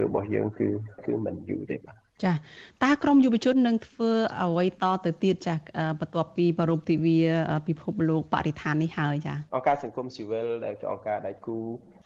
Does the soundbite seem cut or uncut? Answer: cut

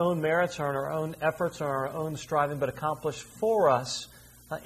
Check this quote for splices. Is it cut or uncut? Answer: uncut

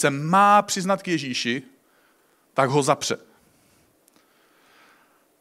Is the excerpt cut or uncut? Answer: uncut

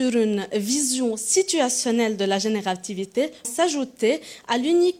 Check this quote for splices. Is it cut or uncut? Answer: cut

